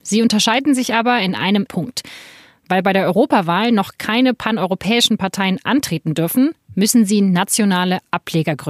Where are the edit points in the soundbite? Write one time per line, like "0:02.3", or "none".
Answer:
0:01.7